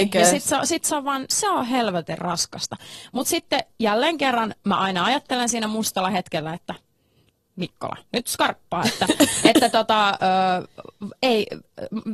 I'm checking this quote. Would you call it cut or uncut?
uncut